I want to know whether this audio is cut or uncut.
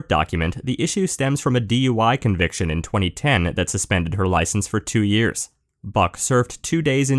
uncut